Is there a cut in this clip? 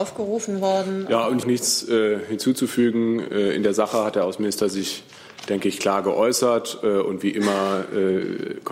yes; 1 cut; at 1.4 s

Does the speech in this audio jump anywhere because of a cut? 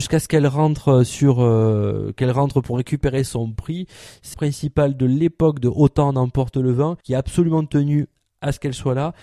yes; 2 cuts; at 4.3 s, 7.0 s

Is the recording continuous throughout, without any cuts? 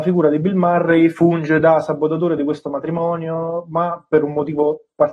yes; 0 cuts

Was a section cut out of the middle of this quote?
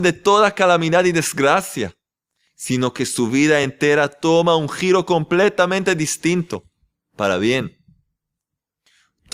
no; 0 cuts

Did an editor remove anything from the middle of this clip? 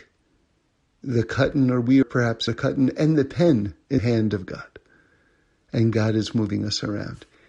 yes; 3 cuts; at 2.0 s, 2.5 s, 4.0 s

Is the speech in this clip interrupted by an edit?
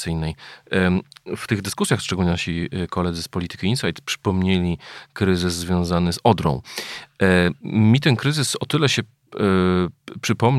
no; 0 cuts

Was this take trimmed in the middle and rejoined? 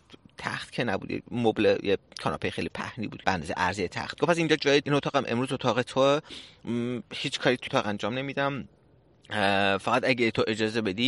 yes; 5 cuts; at 3.2 s, 4.1 s, 4.8 s, 7.1 s, 7.7 s

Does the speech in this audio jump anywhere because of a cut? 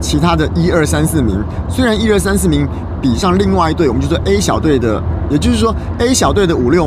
no; 0 cuts

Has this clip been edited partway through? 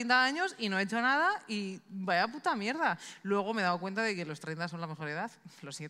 no; 0 cuts

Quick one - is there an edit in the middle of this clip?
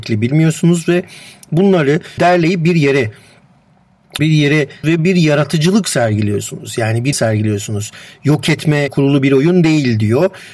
yes; 5 cuts; at 2.2 s, 4.2 s, 4.8 s, 7.1 s, 8.9 s

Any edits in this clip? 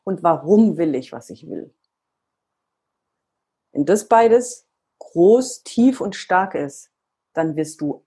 no; 0 cuts

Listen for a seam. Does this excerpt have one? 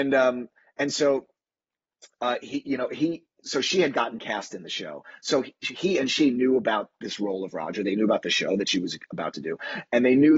no; 0 cuts

